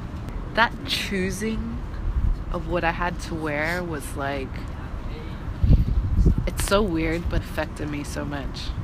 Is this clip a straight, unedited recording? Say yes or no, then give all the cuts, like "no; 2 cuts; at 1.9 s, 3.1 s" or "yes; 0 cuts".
no; 1 cut; at 7.4 s